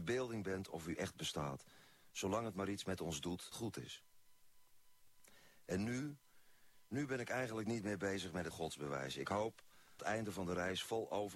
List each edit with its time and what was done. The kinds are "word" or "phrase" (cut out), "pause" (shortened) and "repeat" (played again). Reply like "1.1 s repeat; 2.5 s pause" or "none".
3.5 s word; 8.5 s word; 10.0 s phrase